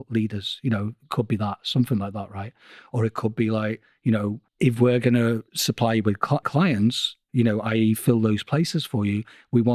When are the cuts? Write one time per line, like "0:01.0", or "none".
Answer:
0:04.5
0:05.5
0:06.4